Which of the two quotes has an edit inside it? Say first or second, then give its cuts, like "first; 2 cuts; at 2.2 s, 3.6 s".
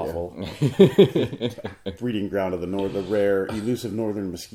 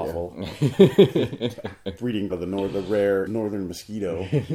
second; 2 cuts; at 2.3 s, 3.3 s